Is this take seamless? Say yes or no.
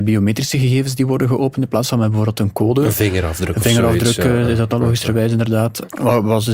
yes